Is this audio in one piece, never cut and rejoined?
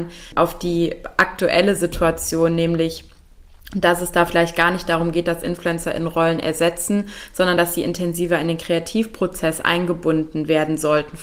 yes; 0 cuts

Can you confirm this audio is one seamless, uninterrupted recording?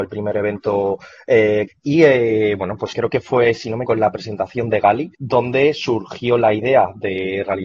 no; 4 cuts; at 1.7 s, 2.9 s, 3.9 s, 5.1 s

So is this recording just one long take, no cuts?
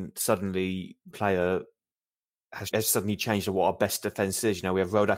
no; 2 cuts; at 1.1 s, 2.7 s

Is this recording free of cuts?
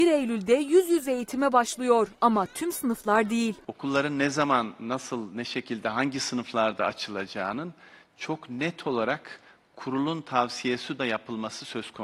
no; 1 cut; at 11.0 s

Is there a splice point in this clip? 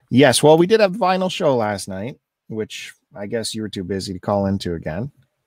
no; 0 cuts

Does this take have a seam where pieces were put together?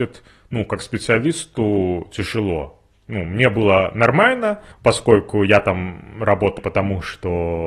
yes; 2 cuts; at 4.7 s, 6.6 s

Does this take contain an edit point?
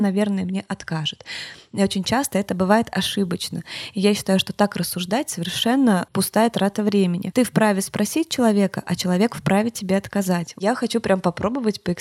no; 0 cuts

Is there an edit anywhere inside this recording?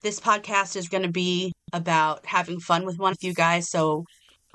yes; 3 cuts; at 0.9 s, 1.6 s, 3.1 s

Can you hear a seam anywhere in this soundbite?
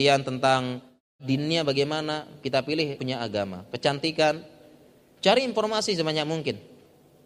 yes; 1 cut; at 3.0 s

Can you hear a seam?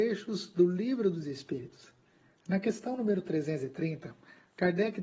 no; 0 cuts

